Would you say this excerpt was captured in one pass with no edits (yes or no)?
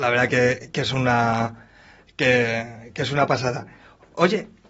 yes